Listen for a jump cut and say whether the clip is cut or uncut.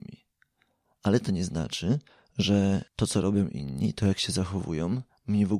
cut